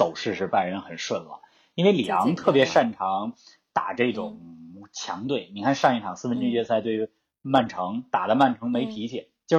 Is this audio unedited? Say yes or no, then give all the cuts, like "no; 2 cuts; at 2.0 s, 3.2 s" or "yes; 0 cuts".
yes; 0 cuts